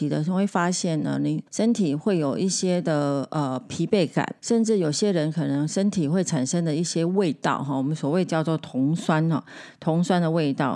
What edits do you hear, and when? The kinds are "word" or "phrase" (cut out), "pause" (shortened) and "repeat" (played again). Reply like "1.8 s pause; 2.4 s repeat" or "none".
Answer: 1.5 s pause; 4.4 s pause